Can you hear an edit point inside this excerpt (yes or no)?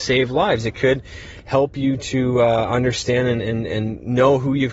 no